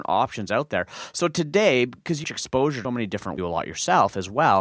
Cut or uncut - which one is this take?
cut